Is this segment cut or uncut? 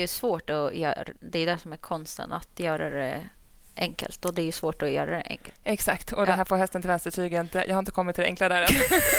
uncut